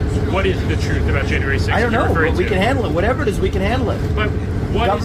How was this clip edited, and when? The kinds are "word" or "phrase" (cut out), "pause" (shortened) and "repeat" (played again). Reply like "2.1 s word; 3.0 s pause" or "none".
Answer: none